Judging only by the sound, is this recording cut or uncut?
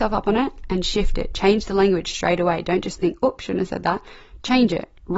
uncut